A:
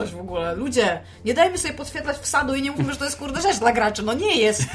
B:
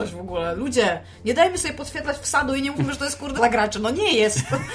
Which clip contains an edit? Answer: B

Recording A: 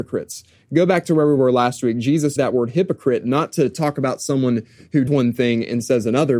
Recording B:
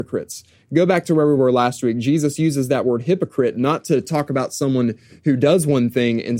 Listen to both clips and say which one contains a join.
A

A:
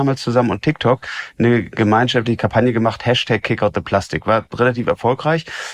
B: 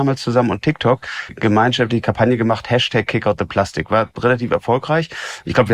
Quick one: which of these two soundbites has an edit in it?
B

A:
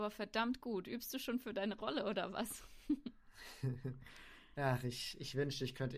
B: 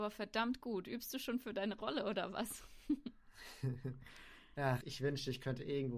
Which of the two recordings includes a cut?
B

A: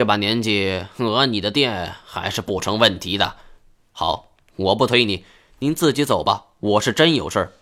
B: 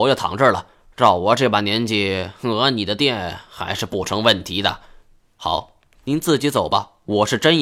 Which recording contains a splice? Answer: B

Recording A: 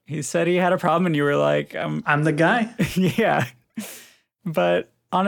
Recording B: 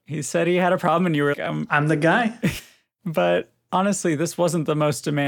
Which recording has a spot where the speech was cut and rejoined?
B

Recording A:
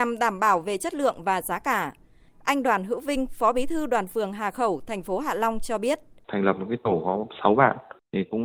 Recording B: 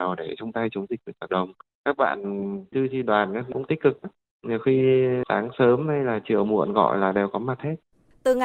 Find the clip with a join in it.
B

